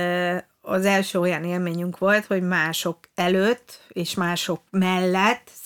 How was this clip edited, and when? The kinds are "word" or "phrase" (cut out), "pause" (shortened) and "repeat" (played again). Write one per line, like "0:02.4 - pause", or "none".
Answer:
0:04.7 - pause